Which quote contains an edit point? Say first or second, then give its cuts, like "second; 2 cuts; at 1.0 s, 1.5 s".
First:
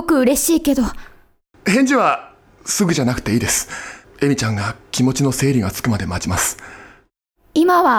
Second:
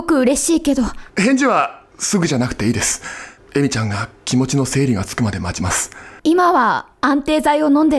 second; 3 cuts; at 1.1 s, 1.9 s, 6.2 s